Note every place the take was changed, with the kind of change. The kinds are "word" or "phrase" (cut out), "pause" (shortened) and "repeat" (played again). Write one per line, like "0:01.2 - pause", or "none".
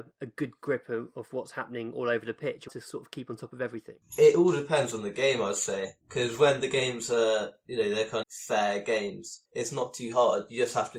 0:02.7 - phrase
0:08.2 - phrase